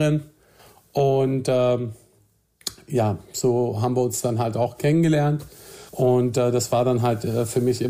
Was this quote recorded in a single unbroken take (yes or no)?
no